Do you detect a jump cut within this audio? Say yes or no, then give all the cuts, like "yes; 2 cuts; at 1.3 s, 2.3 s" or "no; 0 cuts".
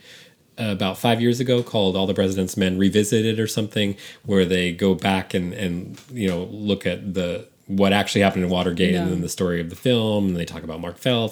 no; 0 cuts